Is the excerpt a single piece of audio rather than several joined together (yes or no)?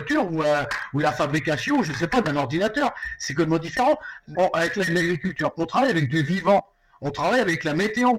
no